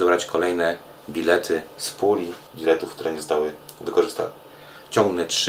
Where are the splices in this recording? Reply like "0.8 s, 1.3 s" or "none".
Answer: 1.0 s, 2.5 s